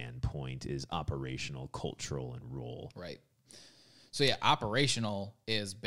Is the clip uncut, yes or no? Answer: yes